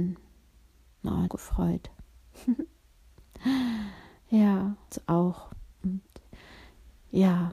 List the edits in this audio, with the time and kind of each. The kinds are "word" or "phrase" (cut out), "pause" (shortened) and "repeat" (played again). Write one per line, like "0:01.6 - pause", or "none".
0:01.3 - phrase
0:04.9 - phrase
0:05.7 - pause